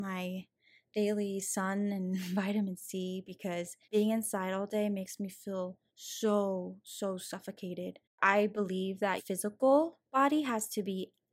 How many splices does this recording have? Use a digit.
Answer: 3